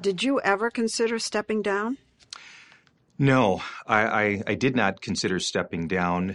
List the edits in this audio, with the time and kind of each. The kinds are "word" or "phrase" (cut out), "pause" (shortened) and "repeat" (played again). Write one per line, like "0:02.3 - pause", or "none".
none